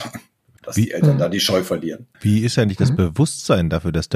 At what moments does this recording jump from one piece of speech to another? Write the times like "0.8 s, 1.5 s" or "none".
2.1 s